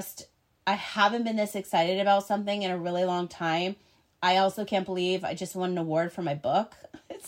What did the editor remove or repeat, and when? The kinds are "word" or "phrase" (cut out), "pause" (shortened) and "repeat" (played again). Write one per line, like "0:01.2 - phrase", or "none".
none